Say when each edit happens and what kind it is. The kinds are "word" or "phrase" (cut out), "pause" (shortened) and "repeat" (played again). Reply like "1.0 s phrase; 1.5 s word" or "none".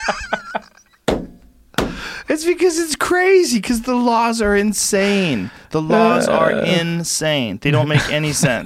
none

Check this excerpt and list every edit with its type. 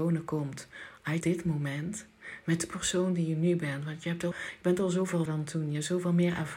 1.2 s phrase; 4.3 s word; 5.3 s word

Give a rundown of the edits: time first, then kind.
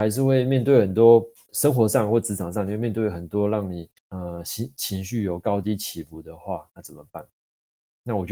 1.3 s pause; 4.0 s pause

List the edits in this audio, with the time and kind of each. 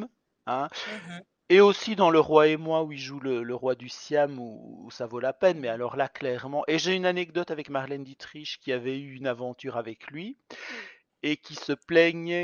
none

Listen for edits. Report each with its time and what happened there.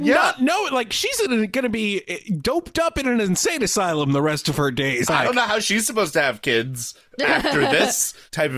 5.1 s phrase

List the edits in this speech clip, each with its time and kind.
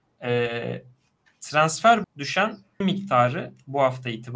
2.0 s word; 2.8 s word

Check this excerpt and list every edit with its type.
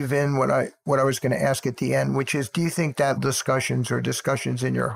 3.2 s phrase

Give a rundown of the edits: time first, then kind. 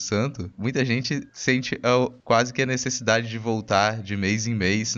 2.2 s pause

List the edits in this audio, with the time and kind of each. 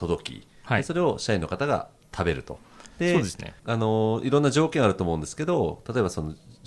3.6 s pause

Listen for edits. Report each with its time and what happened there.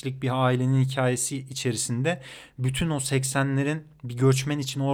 none

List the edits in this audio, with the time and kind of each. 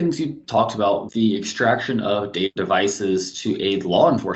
1.1 s word; 2.6 s word

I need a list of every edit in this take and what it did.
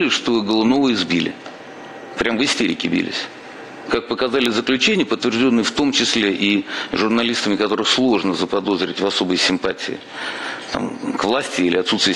none

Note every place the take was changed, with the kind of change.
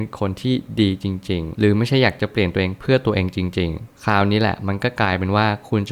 1.5 s word

